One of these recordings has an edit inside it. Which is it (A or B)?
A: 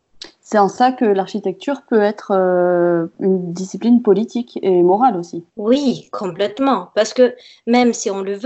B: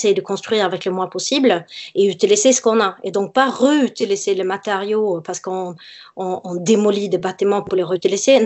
A